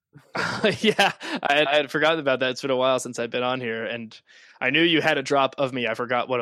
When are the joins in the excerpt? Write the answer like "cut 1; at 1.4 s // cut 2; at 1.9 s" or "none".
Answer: cut 1; at 1.7 s